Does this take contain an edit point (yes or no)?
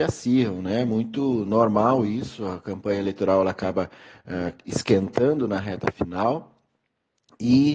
no